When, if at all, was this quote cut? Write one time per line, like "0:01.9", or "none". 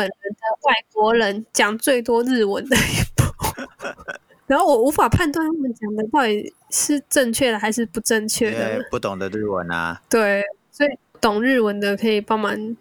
0:06.6